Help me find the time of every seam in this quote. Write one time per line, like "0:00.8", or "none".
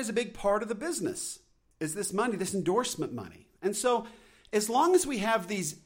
none